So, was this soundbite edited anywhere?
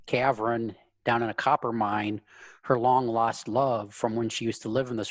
no; 0 cuts

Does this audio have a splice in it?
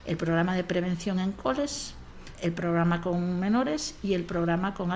yes; 1 cut; at 2.3 s

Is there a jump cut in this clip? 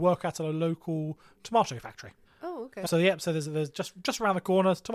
yes; 1 cut; at 2.2 s

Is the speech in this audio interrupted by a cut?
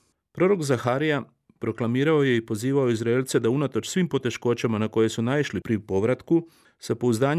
no; 0 cuts

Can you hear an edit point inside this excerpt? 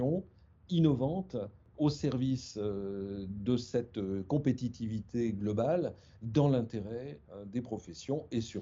no; 0 cuts

